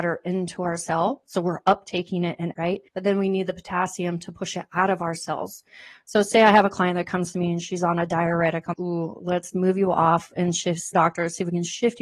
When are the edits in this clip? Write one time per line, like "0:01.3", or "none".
0:02.5
0:02.9
0:08.7
0:10.9